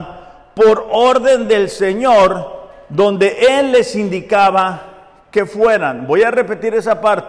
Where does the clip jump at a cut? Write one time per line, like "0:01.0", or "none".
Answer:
none